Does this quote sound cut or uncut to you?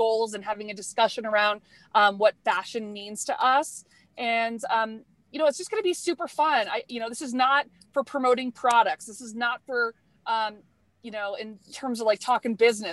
uncut